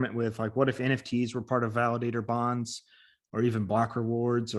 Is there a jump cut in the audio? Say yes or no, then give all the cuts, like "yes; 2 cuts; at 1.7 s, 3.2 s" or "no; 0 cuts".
no; 0 cuts